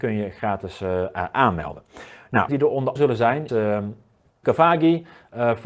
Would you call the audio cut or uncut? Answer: cut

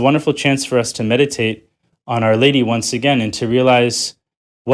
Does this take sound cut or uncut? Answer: uncut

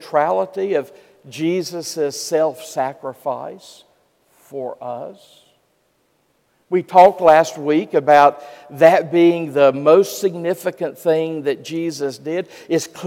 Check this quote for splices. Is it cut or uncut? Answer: uncut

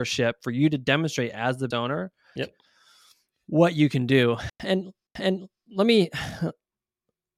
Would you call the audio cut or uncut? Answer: cut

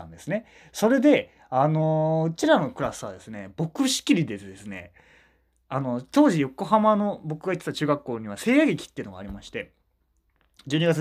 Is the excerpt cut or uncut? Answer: uncut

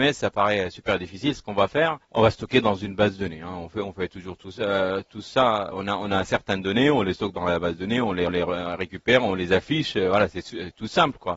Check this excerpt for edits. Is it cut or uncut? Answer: cut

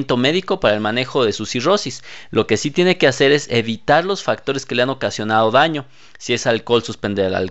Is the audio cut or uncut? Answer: uncut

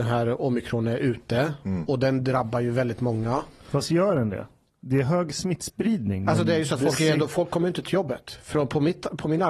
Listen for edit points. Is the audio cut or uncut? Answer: uncut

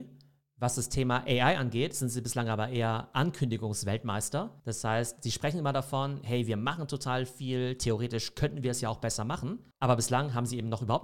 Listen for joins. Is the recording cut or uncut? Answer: cut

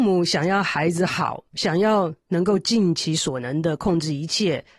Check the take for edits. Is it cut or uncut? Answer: cut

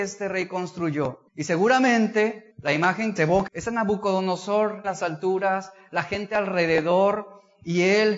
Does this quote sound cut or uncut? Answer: cut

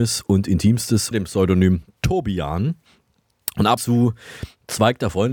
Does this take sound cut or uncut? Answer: cut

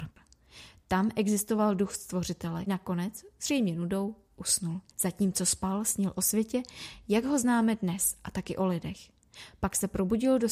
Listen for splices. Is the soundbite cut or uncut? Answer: cut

